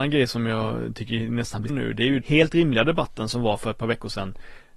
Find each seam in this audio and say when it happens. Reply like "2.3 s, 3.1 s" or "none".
1.7 s, 2.2 s